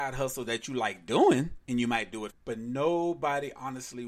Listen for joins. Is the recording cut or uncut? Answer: cut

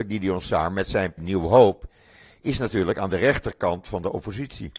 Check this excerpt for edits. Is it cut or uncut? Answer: cut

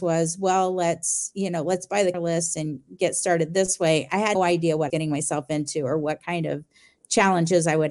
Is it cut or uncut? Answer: cut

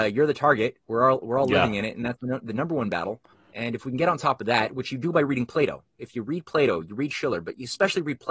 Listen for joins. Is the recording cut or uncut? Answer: cut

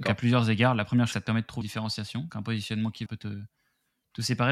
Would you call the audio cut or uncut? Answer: cut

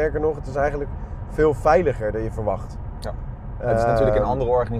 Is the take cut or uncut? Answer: uncut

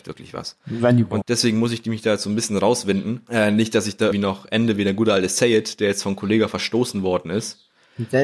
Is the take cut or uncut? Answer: cut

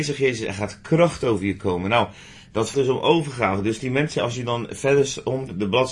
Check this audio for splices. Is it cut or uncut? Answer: cut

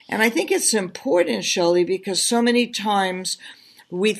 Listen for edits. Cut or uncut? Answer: uncut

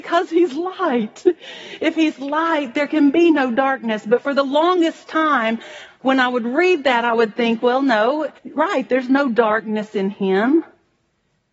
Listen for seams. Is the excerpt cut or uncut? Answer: cut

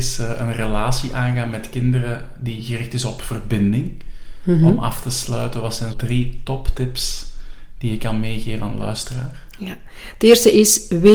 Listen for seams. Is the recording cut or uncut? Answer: cut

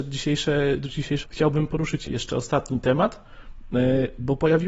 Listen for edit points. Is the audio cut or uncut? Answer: cut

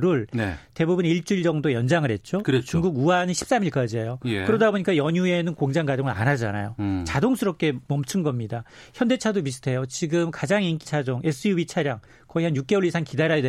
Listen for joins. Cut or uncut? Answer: cut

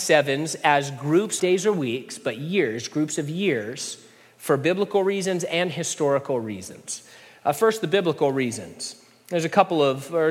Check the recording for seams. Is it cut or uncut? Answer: cut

